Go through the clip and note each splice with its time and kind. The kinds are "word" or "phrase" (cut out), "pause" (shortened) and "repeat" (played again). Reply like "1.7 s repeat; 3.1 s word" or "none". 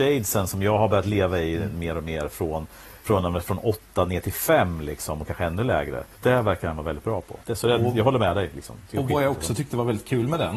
3.0 s pause; 6.1 s pause; 7.4 s pause